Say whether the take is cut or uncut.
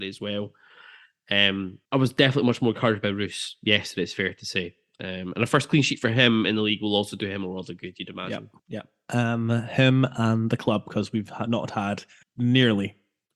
cut